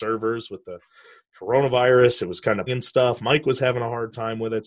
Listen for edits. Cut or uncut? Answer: cut